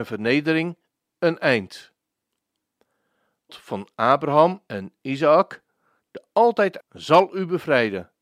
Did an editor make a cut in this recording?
yes; 2 cuts; at 3.5 s, 6.8 s

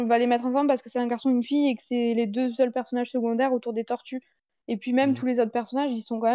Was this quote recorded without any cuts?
yes; 0 cuts

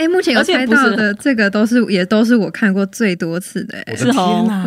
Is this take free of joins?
yes; 0 cuts

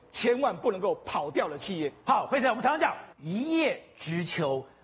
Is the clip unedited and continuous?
no; 1 cut; at 3.1 s

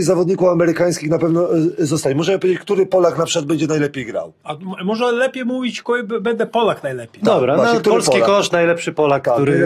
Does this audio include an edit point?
no; 0 cuts

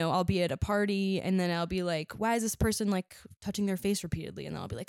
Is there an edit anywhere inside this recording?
no; 0 cuts

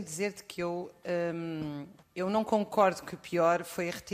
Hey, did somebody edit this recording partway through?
yes; 1 cut; at 2.0 s

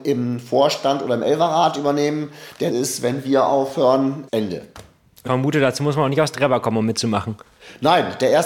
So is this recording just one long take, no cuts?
no; 3 cuts; at 2.7 s, 4.3 s, 5.3 s

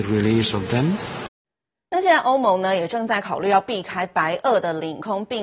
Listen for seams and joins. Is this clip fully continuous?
no; 1 cut; at 1.4 s

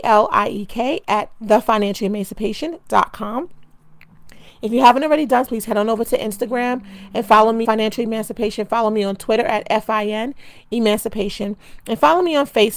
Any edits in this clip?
yes; 2 cuts; at 5.5 s, 7.6 s

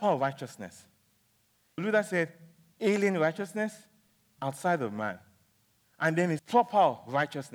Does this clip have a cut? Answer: yes; 3 cuts; at 1.8 s, 4.4 s, 6.4 s

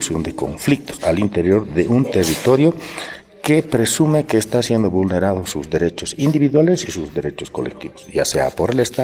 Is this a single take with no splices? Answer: yes; 0 cuts

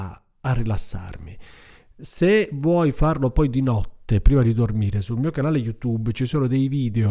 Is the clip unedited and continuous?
yes; 0 cuts

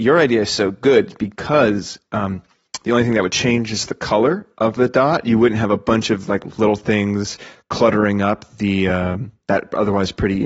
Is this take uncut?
yes; 0 cuts

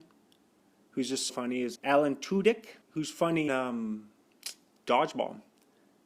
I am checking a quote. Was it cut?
yes; 4 cuts; at 1.3 s, 1.8 s, 2.8 s, 3.5 s

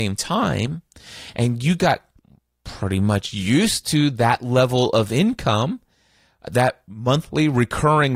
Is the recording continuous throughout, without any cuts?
yes; 0 cuts

